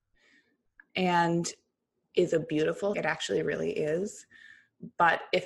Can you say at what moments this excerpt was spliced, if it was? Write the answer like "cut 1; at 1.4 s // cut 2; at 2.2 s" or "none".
cut 1; at 2.0 s // cut 2; at 2.9 s